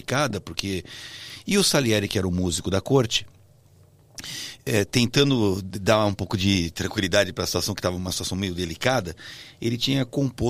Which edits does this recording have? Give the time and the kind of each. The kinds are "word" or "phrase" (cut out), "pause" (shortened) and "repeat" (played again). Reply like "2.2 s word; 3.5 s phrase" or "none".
none